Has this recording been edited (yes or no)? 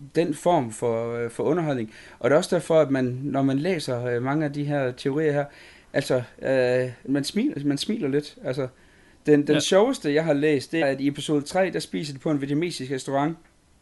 yes